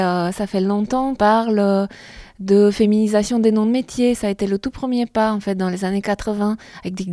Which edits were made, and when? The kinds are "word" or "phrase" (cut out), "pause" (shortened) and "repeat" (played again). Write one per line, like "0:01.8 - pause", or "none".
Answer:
0:01.2 - word